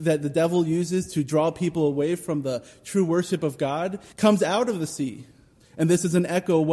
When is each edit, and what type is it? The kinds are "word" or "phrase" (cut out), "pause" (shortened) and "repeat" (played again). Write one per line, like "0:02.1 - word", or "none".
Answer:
0:04.1 - pause
0:05.6 - pause